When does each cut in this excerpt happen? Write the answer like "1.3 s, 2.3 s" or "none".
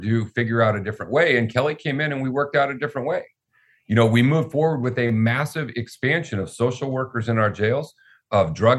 none